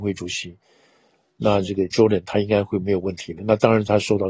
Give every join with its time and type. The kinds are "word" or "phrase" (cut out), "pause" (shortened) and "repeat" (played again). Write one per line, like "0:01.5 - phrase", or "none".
0:01.9 - word